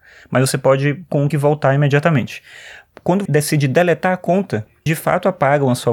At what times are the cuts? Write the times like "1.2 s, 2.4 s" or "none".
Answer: 1.3 s, 3.3 s, 4.9 s